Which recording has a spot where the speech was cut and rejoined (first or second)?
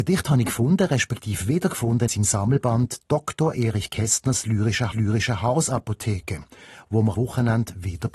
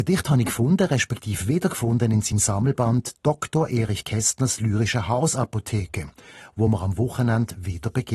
first